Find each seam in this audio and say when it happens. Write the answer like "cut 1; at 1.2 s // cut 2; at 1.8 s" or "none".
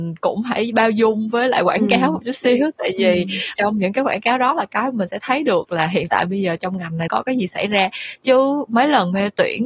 cut 1; at 3.5 s // cut 2; at 7.1 s

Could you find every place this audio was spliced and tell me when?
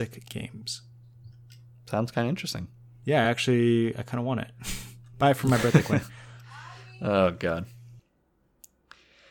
none

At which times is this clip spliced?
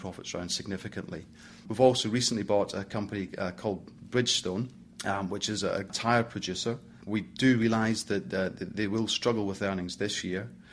cut 1; at 5.9 s

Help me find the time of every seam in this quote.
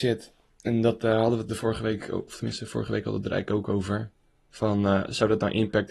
none

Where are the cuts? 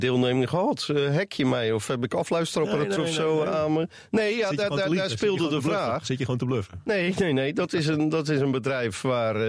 cut 1; at 3.0 s

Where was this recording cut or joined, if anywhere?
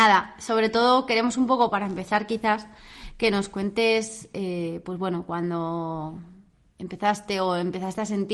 none

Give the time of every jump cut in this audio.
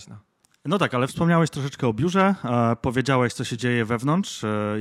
cut 1; at 1.1 s

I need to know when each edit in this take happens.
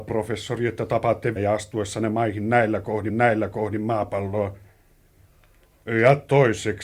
cut 1; at 1.4 s // cut 2; at 3.1 s

